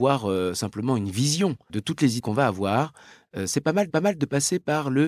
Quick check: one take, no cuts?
no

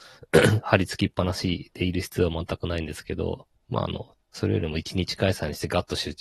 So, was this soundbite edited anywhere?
yes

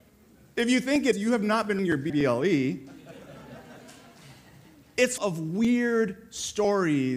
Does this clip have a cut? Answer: yes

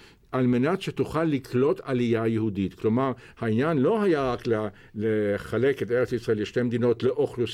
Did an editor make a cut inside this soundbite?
no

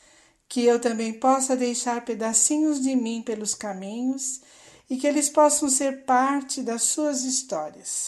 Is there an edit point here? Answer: no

